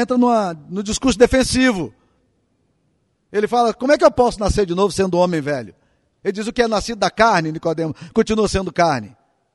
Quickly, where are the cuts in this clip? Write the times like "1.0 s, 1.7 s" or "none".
none